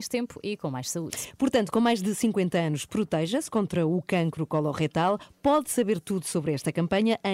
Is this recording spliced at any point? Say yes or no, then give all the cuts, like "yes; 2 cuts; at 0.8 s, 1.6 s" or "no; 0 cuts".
no; 0 cuts